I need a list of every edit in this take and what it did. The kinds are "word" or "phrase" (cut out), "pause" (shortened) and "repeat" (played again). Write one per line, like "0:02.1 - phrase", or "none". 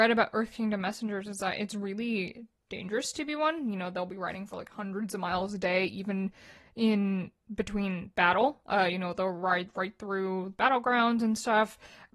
none

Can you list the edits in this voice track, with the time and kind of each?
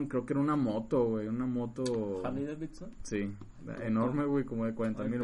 none

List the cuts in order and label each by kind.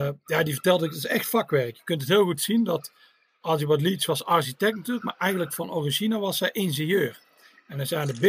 none

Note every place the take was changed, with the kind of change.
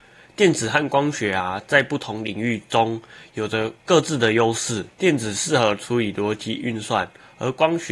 0:03.8 - pause
0:04.9 - pause

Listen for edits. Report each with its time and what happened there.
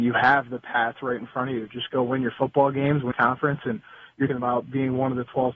0:03.1 - word
0:04.3 - word

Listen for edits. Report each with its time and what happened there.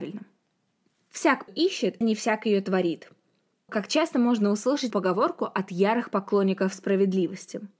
0:01.5 - word
0:02.0 - word
0:03.7 - word
0:04.9 - word

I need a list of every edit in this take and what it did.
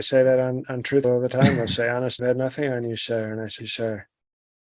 0:01.0 - word
0:02.2 - word
0:03.6 - word

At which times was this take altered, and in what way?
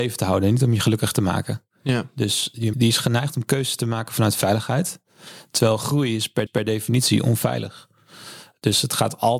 0:02.7 - word
0:06.5 - repeat

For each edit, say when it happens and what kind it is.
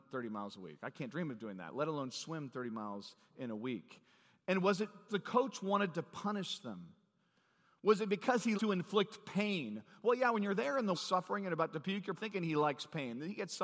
0:05.1 - word
0:08.5 - word
0:10.9 - word
0:12.1 - word

